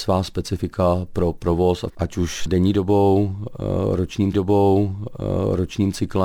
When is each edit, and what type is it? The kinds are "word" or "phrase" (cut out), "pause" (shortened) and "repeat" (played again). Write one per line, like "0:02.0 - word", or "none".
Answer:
0:01.9 - word
0:02.5 - word
0:04.3 - repeat